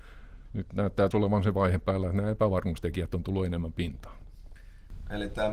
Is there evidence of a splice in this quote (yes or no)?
yes